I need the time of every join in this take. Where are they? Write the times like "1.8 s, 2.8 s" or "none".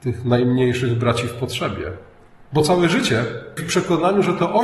3.6 s